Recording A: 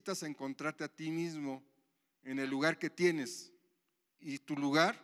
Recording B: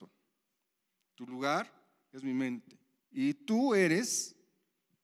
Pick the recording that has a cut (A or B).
B